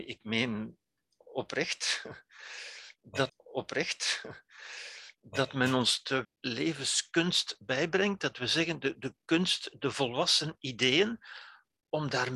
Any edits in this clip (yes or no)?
yes